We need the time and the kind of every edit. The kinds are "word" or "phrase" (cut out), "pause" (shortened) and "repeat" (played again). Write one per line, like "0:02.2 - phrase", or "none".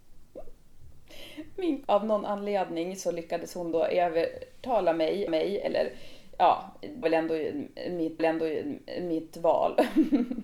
0:01.8 - word
0:05.3 - repeat
0:07.0 - word
0:08.2 - repeat